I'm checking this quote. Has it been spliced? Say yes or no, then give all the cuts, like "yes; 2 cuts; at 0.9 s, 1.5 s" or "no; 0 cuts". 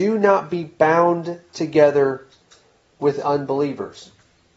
no; 0 cuts